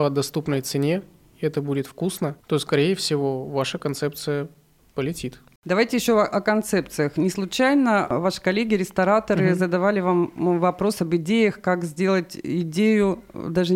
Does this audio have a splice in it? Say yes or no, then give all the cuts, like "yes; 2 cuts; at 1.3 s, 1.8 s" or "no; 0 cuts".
no; 0 cuts